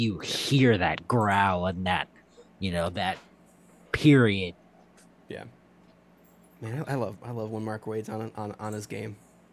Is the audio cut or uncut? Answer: uncut